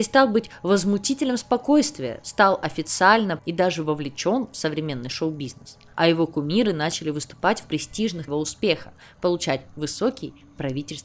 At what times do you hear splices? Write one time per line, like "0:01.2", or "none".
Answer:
0:03.4
0:08.3

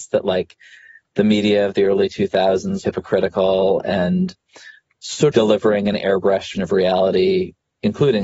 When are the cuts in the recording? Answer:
0:02.8
0:05.3
0:06.5

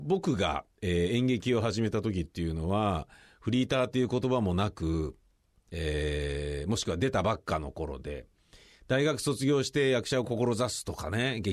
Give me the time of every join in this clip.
none

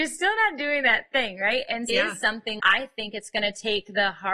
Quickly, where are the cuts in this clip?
0:01.9
0:02.6

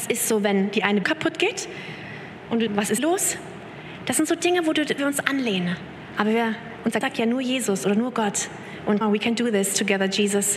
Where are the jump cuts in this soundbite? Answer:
0:01.0
0:02.7
0:03.0
0:05.0
0:07.0
0:09.0

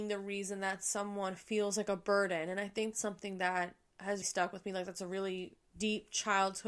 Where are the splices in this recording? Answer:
0:02.9
0:04.2
0:05.7

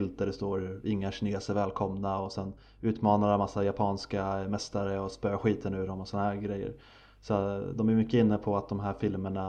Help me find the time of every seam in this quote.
none

